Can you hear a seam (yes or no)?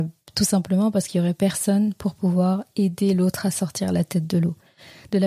no